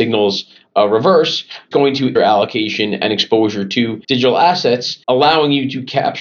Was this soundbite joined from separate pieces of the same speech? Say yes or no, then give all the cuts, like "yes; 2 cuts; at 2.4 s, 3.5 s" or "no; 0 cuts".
yes; 4 cuts; at 1.7 s, 2.2 s, 4.0 s, 5.0 s